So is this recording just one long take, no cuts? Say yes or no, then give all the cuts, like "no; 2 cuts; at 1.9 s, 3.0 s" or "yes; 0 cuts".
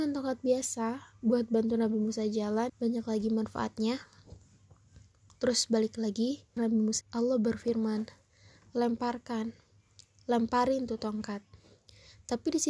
no; 3 cuts; at 2.7 s, 6.6 s, 7.0 s